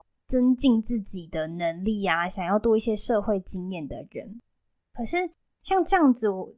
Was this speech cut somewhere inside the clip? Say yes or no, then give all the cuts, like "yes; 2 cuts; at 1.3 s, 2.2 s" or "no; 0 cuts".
no; 0 cuts